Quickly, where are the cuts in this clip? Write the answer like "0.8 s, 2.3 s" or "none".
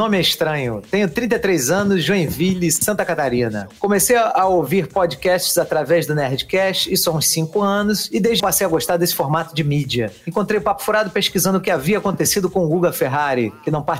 8.4 s